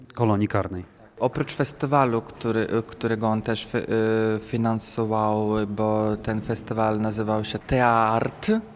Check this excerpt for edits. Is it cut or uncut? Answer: uncut